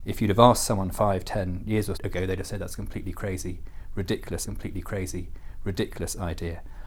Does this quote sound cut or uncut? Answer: cut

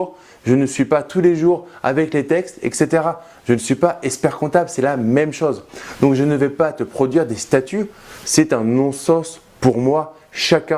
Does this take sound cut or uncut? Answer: uncut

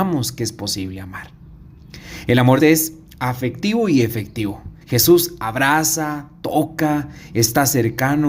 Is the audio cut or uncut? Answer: cut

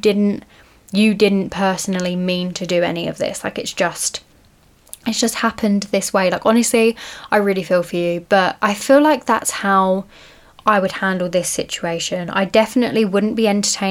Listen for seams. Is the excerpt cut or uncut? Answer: uncut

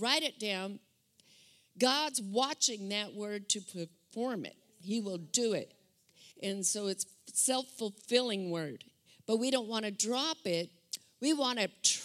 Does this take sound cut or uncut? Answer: cut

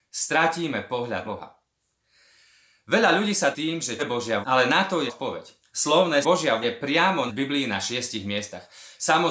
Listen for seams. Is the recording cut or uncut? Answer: cut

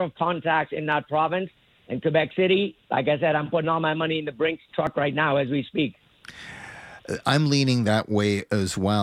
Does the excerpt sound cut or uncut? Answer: uncut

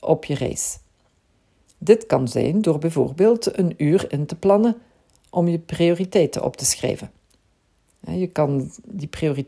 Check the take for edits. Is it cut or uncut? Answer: uncut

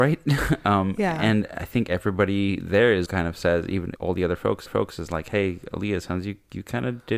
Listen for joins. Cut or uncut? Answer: cut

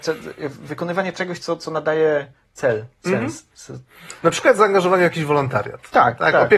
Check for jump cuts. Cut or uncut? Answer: uncut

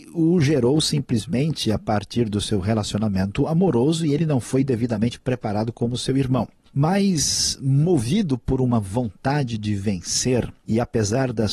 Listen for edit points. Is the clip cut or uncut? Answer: uncut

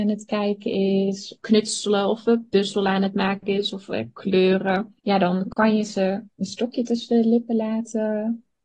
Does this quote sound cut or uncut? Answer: cut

